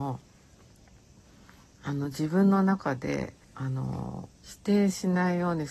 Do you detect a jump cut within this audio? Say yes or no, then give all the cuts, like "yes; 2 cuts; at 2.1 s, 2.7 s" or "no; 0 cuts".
yes; 2 cuts; at 3.4 s, 4.3 s